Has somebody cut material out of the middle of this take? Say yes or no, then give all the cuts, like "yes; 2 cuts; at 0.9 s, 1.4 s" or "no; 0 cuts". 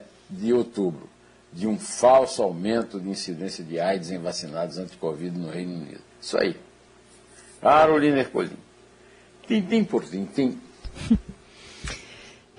yes; 1 cut; at 6.1 s